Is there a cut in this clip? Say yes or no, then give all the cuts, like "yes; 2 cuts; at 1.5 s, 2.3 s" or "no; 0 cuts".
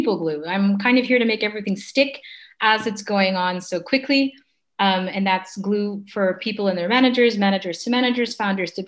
no; 0 cuts